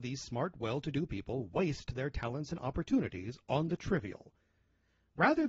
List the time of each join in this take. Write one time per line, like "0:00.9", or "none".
none